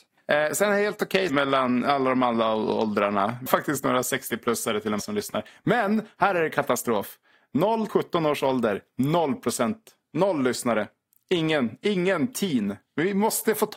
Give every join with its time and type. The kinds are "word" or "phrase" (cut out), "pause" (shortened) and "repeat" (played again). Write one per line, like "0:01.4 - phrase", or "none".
0:01.3 - word
0:03.5 - word
0:05.0 - word
0:07.9 - word